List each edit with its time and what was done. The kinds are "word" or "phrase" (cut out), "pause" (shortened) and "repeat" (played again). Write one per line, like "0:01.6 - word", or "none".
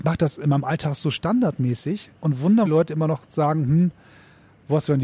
0:02.2 - pause
0:02.7 - phrase